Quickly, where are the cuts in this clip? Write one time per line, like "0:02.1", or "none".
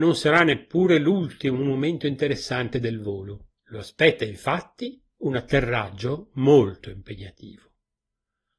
0:03.6